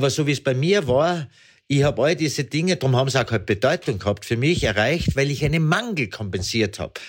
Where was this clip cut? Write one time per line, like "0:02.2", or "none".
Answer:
none